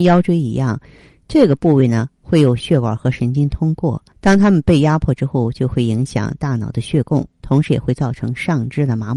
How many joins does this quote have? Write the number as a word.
one